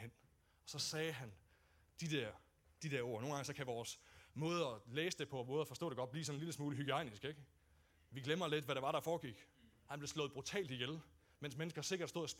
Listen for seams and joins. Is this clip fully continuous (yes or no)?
yes